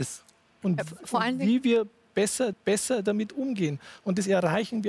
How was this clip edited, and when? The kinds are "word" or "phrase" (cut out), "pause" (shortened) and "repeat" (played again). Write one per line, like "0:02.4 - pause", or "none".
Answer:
0:02.5 - repeat